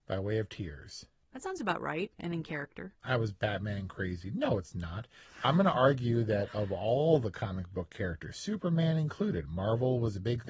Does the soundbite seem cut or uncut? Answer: uncut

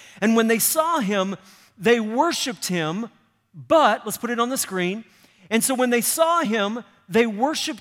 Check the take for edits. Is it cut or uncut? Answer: uncut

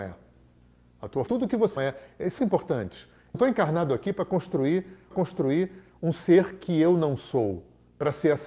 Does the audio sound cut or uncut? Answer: cut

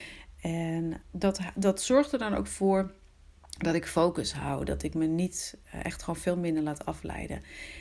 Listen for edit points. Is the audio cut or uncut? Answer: cut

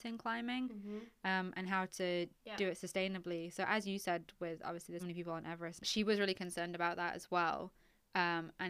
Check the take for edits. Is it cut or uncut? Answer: cut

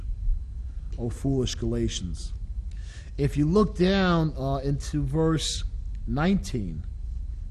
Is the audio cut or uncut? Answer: uncut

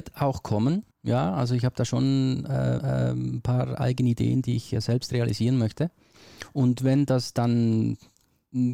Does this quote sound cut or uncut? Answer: cut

